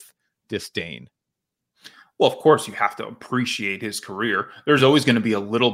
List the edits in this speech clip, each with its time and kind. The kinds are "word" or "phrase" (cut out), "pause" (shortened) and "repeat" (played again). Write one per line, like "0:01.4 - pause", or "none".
none